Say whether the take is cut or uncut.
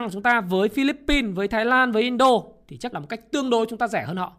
cut